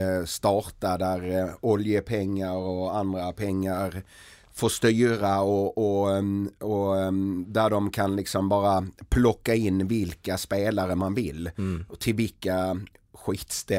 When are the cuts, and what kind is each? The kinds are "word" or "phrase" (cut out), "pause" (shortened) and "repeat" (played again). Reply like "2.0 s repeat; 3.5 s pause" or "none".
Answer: none